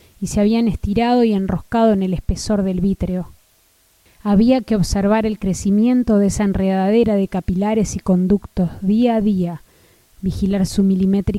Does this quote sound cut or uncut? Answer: uncut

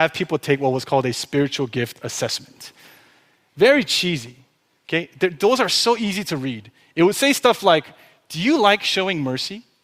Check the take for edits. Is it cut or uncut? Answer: uncut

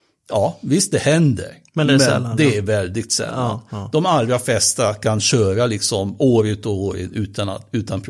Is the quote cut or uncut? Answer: uncut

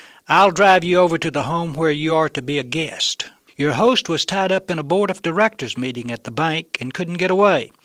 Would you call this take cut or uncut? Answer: uncut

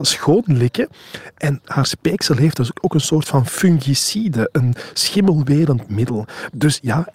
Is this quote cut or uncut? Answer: uncut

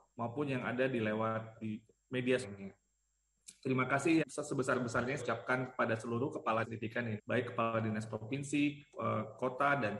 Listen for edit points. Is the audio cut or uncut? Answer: cut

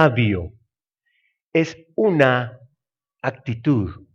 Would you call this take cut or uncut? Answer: uncut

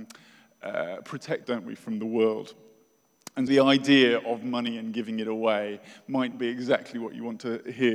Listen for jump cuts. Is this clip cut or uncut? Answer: cut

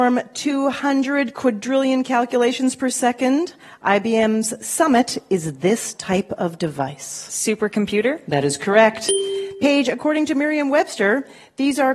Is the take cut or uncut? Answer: uncut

